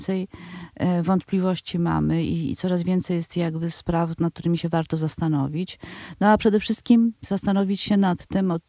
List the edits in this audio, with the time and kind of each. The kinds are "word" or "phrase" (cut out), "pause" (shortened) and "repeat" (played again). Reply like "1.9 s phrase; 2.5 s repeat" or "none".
none